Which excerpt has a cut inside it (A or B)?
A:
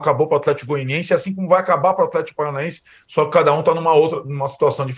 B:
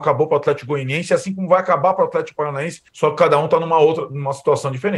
B